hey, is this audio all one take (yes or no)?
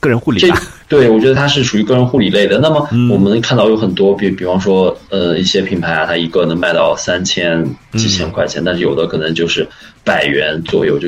yes